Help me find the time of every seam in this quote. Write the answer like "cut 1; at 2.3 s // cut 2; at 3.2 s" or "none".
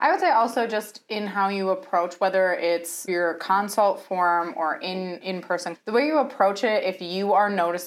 cut 1; at 3.1 s // cut 2; at 5.2 s // cut 3; at 5.7 s